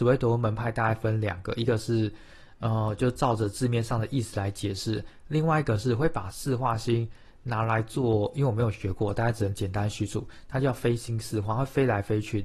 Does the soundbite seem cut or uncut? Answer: uncut